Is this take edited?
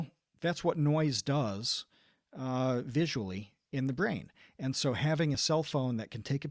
no; 0 cuts

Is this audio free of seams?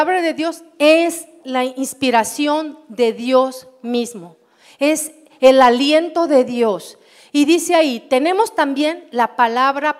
yes; 0 cuts

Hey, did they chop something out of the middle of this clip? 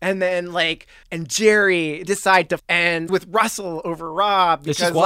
yes; 4 cuts; at 1.0 s, 2.1 s, 2.6 s, 3.1 s

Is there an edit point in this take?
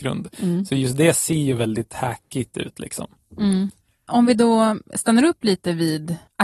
no; 0 cuts

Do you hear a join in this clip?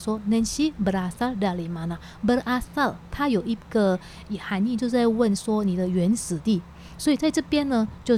no; 0 cuts

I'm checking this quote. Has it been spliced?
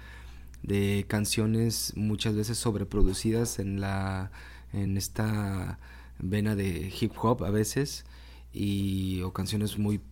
no; 0 cuts

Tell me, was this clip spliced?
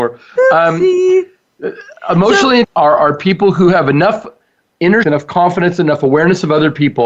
yes; 2 cuts; at 2.6 s, 5.0 s

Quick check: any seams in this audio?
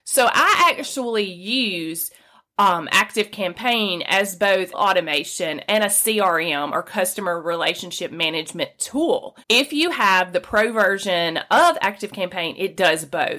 yes; 2 cuts; at 4.7 s, 9.4 s

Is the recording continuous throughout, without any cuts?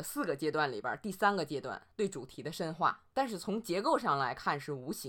no; 2 cuts; at 1.9 s, 3.1 s

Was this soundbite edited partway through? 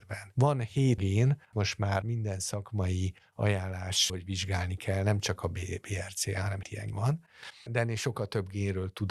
yes; 7 cuts; at 1.0 s, 1.5 s, 2.0 s, 4.1 s, 6.6 s, 6.9 s, 7.7 s

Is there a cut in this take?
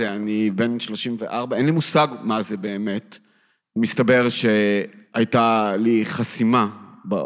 no; 0 cuts

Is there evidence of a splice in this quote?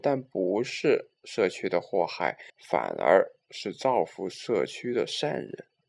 yes; 1 cut; at 2.5 s

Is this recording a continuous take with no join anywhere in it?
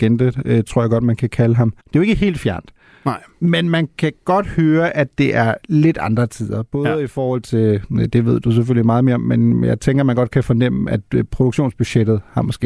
no; 1 cut; at 1.8 s

